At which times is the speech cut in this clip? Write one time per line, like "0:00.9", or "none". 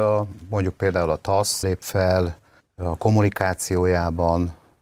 0:01.6
0:02.6